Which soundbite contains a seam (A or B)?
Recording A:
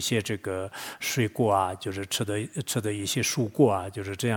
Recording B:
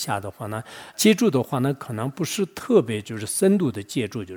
B